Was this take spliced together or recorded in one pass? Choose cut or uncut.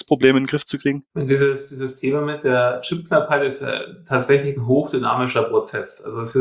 cut